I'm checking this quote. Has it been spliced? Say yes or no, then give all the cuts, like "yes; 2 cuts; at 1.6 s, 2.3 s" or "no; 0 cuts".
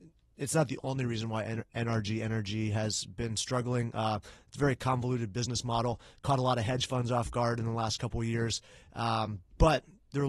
no; 0 cuts